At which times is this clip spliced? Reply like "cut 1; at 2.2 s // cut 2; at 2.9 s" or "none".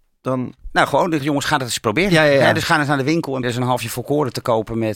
cut 1; at 1.2 s // cut 2; at 3.4 s